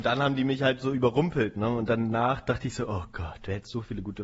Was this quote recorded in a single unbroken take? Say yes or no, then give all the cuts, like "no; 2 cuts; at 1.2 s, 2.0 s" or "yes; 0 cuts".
yes; 0 cuts